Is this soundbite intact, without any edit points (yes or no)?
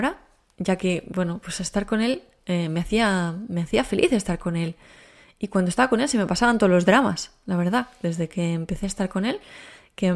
yes